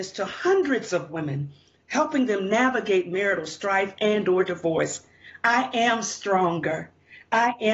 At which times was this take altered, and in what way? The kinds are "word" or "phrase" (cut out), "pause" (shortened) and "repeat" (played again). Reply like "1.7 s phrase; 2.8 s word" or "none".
none